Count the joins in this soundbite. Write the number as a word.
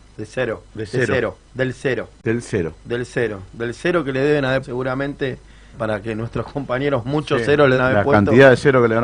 six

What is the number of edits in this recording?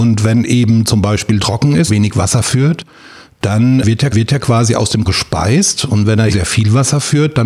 five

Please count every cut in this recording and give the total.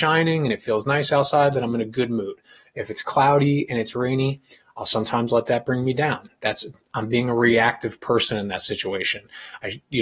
zero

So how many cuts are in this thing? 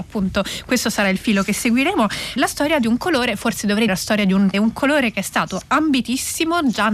three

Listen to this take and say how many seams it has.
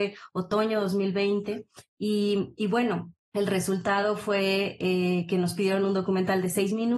one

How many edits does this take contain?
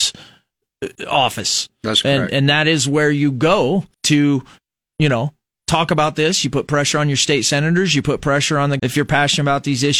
three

